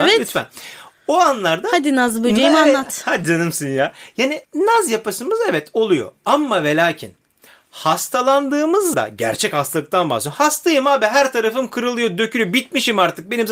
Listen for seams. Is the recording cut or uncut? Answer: cut